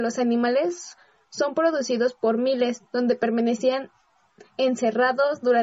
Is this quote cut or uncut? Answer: uncut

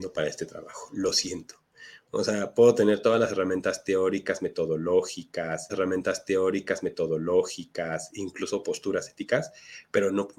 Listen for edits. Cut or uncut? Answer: cut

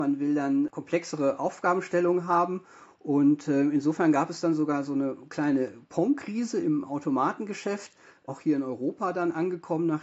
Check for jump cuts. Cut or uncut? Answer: uncut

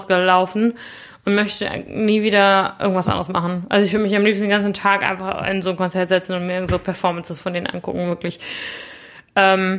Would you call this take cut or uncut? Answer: uncut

